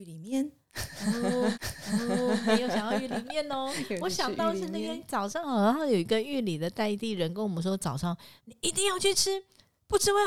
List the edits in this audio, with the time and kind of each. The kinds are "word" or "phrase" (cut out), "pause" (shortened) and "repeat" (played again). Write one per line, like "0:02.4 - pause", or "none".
0:01.5 - repeat
0:08.4 - pause